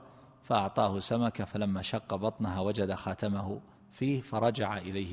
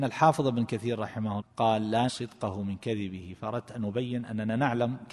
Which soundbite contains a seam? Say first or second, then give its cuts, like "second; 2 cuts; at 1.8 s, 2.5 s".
second; 2 cuts; at 1.4 s, 2.1 s